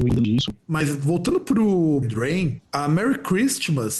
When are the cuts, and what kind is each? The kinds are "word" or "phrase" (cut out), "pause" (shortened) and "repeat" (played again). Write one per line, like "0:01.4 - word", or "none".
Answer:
0:02.0 - word